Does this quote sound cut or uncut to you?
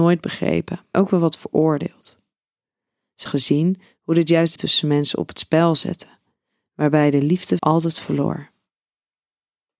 cut